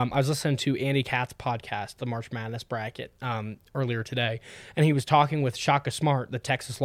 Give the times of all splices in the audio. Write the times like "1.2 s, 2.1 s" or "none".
none